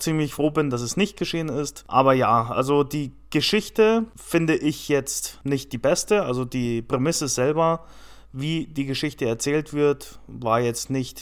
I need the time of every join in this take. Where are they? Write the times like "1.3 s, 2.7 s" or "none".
none